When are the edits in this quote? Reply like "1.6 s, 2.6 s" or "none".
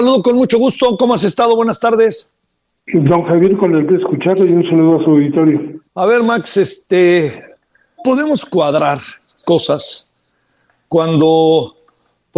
3.9 s, 5.9 s, 8.0 s, 9.4 s